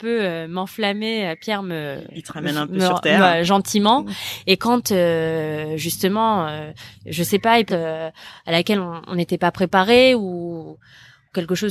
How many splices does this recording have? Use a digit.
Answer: 1